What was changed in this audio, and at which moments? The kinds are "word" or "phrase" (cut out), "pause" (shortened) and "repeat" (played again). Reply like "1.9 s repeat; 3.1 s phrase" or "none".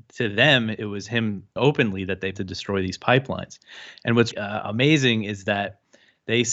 1.6 s word; 2.3 s word; 4.3 s word